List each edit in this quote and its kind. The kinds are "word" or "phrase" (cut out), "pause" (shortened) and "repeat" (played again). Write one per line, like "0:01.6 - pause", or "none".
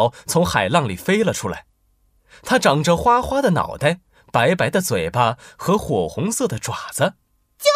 none